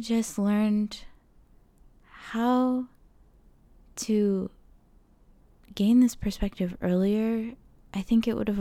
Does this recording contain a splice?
no; 0 cuts

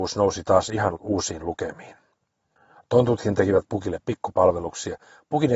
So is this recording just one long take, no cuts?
yes; 0 cuts

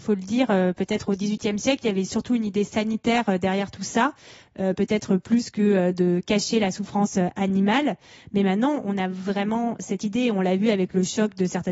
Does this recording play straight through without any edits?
yes; 0 cuts

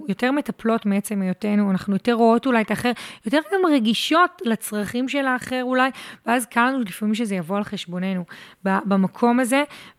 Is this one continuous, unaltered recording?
yes; 0 cuts

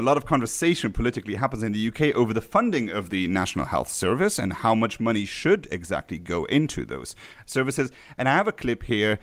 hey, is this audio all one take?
yes; 0 cuts

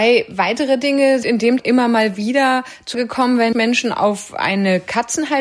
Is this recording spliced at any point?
yes; 4 cuts; at 1.2 s, 1.6 s, 2.9 s, 3.5 s

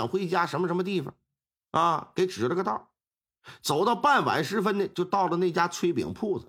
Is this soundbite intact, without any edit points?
yes; 0 cuts

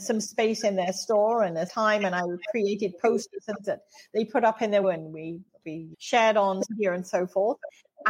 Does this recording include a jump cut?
yes; 5 cuts; at 1.7 s, 3.6 s, 4.8 s, 5.9 s, 6.6 s

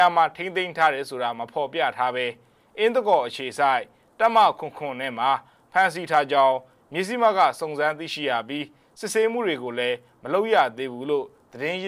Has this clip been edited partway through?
no; 0 cuts

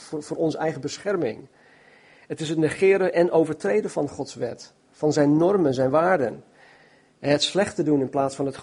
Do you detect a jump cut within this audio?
no; 0 cuts

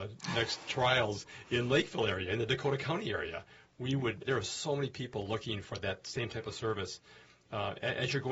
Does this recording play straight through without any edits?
no; 1 cut; at 4.3 s

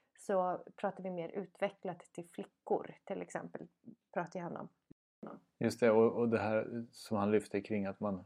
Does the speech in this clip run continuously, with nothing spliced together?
yes; 0 cuts

